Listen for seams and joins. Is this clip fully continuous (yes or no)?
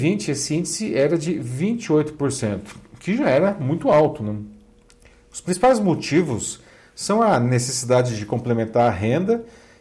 yes